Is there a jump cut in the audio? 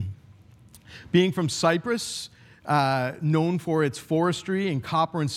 no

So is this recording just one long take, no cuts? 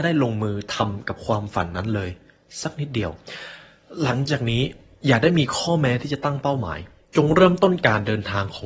yes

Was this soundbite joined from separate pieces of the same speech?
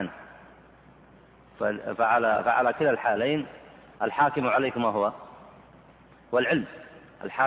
no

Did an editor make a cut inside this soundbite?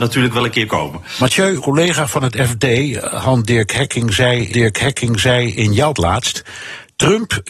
yes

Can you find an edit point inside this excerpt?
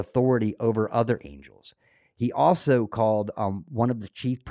no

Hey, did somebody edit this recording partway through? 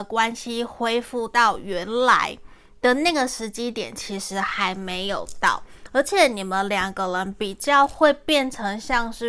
no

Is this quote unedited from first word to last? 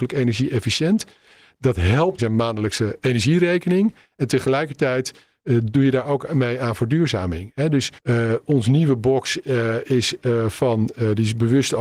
no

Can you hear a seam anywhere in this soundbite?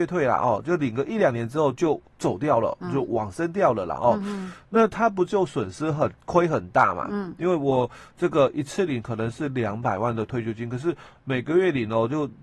yes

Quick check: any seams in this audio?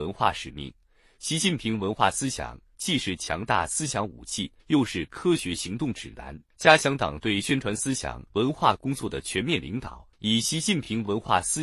yes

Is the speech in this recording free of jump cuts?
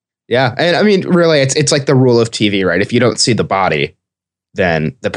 yes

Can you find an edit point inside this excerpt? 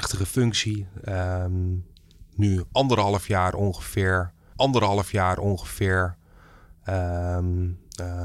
yes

